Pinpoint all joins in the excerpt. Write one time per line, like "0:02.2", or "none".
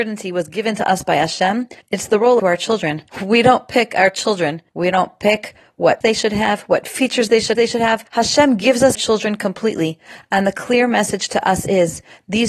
0:01.8
0:02.4
0:03.1
0:04.7
0:06.0
0:07.5
0:08.1
0:08.9